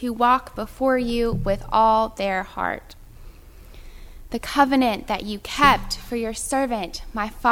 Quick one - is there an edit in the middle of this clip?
no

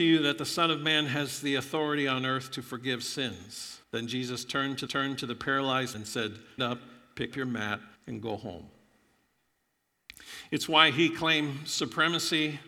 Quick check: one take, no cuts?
no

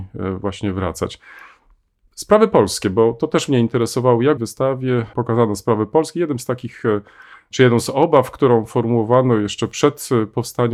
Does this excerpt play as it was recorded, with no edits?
no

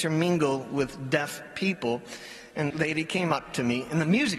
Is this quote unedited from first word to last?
no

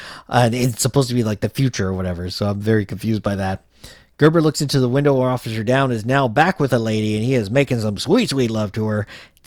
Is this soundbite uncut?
yes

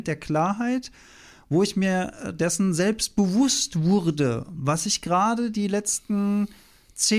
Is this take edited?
no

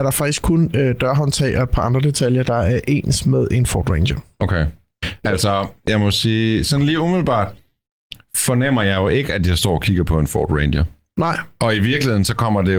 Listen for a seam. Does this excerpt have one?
no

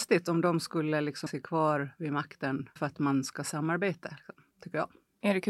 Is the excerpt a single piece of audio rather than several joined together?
no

